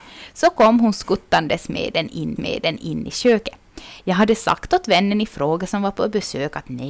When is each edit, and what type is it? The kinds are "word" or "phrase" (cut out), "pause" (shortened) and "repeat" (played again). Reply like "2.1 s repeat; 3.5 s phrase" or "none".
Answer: 2.4 s repeat